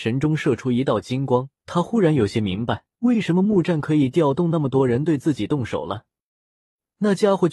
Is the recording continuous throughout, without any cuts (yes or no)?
no